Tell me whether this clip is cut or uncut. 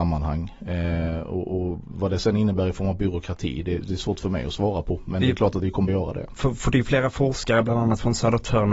cut